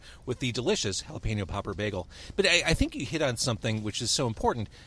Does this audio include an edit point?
no; 0 cuts

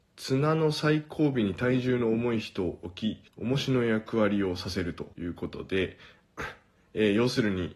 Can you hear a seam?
yes; 2 cuts; at 3.3 s, 5.1 s

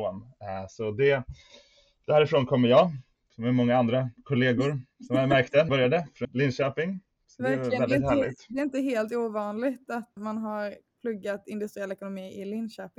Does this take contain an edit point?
yes; 3 cuts; at 5.7 s, 6.2 s, 10.2 s

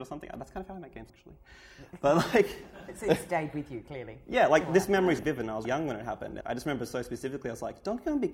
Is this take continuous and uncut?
no; 4 cuts; at 1.1 s, 5.2 s, 5.6 s, 6.4 s

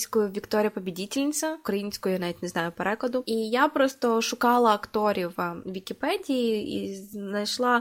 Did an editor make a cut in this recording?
no; 0 cuts

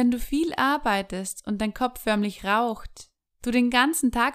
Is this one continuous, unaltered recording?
yes; 0 cuts

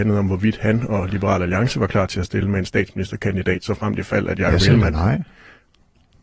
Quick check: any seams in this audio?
no; 0 cuts

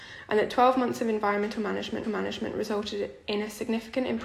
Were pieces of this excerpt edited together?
yes; 1 cut; at 2.0 s

